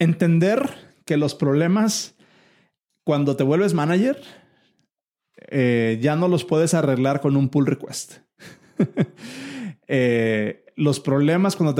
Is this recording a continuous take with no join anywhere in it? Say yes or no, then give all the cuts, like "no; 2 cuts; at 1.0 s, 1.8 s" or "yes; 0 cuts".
yes; 0 cuts